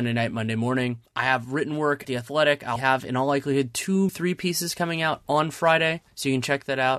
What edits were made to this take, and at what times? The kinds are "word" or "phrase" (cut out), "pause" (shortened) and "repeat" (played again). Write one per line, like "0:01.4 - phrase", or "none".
0:02.0 - word
0:02.8 - word
0:04.1 - word